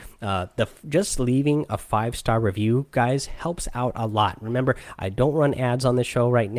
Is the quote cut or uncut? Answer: uncut